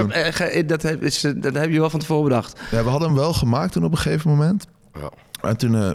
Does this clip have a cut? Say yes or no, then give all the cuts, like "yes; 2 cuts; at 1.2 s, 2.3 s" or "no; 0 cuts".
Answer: no; 0 cuts